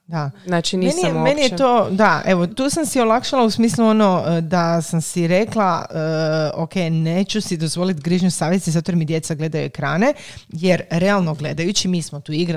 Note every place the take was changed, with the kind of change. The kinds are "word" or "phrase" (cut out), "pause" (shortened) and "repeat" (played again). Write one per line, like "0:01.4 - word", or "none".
0:02.5 - word